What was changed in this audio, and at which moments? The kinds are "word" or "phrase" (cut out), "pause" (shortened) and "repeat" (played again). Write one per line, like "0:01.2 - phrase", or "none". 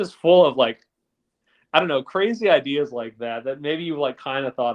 none